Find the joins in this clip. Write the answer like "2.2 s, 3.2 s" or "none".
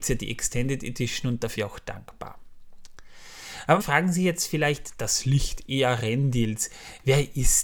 1.5 s, 3.8 s